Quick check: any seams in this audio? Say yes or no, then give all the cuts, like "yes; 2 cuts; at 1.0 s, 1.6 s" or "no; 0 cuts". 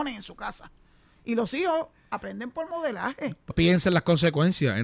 yes; 1 cut; at 3.5 s